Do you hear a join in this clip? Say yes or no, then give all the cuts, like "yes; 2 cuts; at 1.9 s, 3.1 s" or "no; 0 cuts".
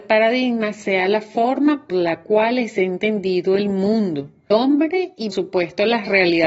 yes; 3 cuts; at 1.9 s, 4.5 s, 5.3 s